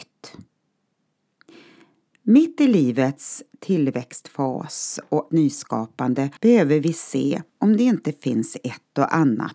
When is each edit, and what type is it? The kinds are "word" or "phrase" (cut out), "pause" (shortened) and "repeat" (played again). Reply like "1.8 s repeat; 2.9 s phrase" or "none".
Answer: 5.3 s word; 6.4 s pause; 7.5 s pause